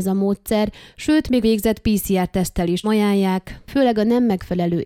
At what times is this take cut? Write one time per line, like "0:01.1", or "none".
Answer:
0:01.4
0:02.8